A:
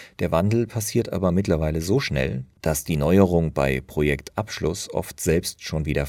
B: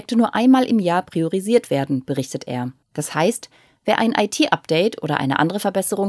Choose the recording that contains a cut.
B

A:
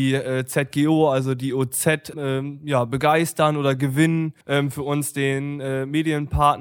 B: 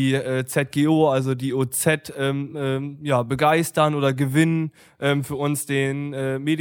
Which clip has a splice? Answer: A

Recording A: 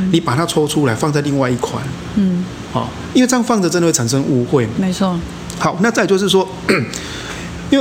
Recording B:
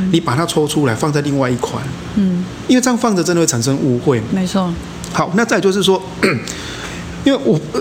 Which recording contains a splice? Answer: B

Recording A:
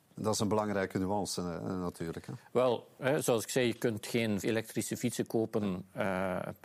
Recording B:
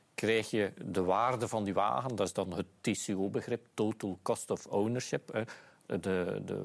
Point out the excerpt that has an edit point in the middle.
A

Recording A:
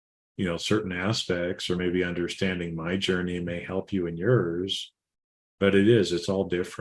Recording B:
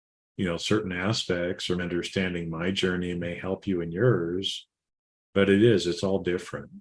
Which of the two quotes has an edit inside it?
B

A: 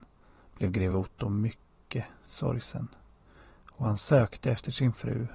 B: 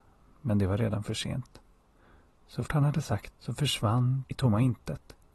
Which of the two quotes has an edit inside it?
B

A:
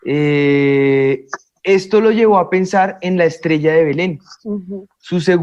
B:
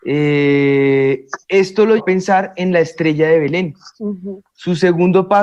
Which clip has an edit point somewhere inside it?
B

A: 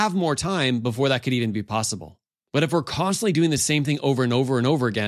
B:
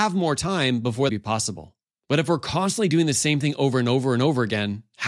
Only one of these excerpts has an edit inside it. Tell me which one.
B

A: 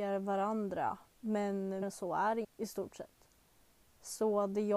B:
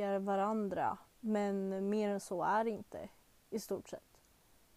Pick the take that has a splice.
A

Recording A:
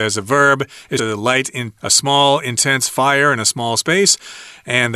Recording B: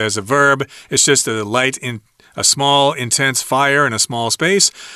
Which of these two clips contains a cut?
A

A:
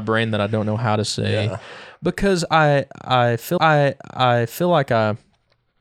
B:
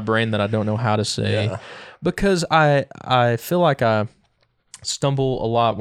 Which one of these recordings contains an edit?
A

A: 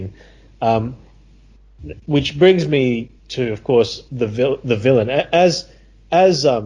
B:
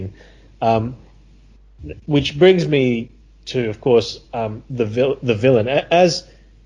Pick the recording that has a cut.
A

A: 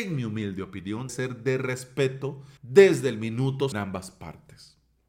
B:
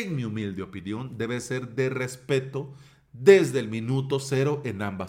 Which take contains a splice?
A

